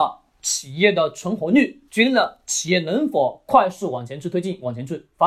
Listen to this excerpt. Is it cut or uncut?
cut